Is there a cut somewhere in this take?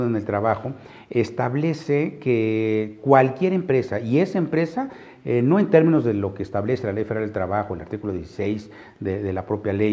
no; 0 cuts

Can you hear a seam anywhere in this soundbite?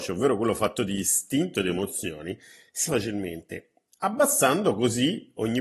yes; 1 cut; at 2.9 s

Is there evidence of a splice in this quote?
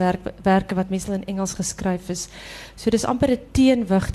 no; 0 cuts

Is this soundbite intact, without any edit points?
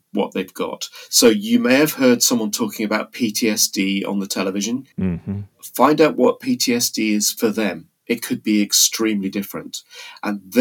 no; 1 cut; at 4.9 s

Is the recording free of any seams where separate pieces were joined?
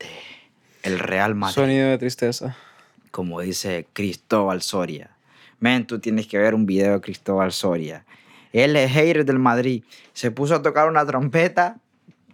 yes; 0 cuts

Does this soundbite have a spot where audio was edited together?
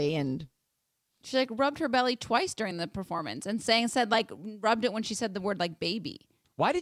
no; 0 cuts

